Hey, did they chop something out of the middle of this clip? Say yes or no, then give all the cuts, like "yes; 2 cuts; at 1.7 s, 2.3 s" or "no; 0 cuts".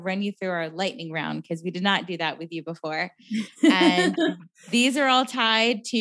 no; 0 cuts